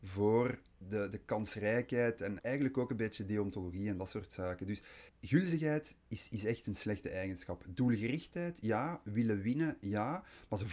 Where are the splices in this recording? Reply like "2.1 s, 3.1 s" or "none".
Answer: 2.4 s, 5.1 s

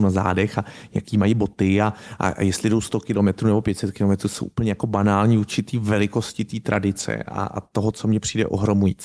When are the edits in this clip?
none

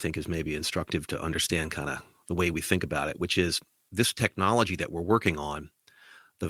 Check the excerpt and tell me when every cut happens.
none

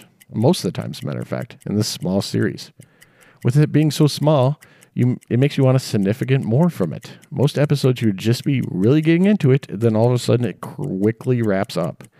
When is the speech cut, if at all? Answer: none

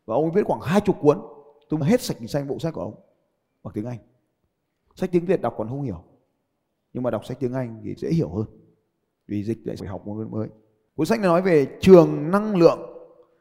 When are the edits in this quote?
1.8 s, 8.0 s, 9.8 s

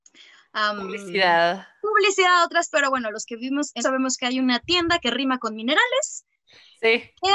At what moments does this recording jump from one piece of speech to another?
2.7 s, 3.8 s

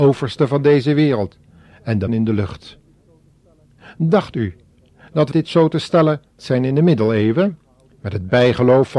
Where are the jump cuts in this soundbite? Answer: 2.1 s, 5.3 s, 6.4 s

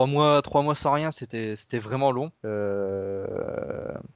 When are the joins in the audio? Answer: 2.4 s

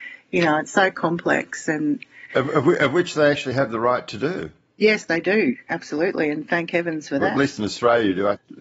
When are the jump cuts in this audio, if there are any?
none

